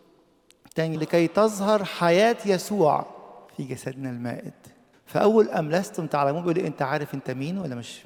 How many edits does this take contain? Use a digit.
3